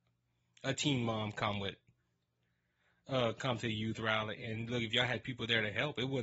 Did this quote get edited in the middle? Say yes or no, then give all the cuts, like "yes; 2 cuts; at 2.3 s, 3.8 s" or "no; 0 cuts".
no; 0 cuts